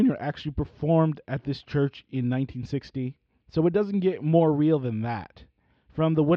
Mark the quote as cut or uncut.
uncut